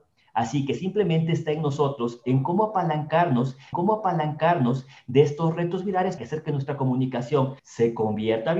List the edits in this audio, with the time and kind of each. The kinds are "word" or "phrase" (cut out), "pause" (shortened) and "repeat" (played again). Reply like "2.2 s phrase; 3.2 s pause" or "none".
3.7 s repeat; 6.2 s word; 7.6 s pause